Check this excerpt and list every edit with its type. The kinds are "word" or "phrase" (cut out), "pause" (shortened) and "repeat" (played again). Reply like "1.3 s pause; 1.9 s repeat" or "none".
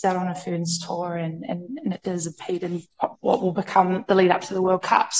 3.2 s pause